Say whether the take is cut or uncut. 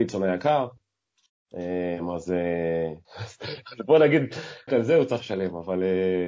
cut